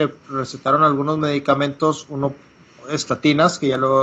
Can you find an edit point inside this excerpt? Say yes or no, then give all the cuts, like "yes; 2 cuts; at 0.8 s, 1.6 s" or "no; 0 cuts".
no; 0 cuts